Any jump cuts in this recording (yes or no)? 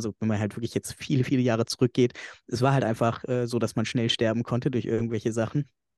no